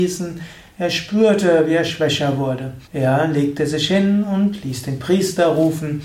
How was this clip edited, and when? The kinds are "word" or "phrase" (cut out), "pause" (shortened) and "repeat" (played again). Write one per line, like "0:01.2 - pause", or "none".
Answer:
0:02.8 - pause